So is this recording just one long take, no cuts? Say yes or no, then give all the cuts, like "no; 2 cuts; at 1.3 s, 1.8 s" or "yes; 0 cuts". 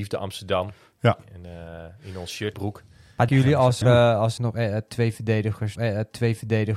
no; 5 cuts; at 2.5 s, 3.3 s, 3.8 s, 4.4 s, 5.8 s